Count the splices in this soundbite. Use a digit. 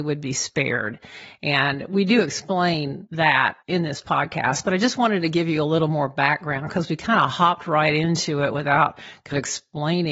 1